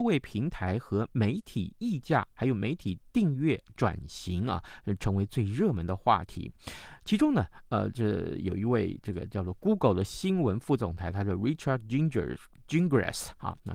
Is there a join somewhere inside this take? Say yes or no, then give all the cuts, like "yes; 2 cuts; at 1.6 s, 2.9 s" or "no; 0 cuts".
no; 0 cuts